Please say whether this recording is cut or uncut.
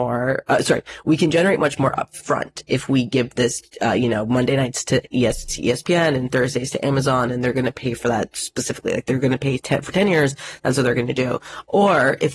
uncut